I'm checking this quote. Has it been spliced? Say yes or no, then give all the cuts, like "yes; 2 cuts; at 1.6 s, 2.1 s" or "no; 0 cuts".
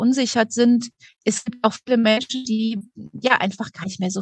yes; 1 cut; at 1.1 s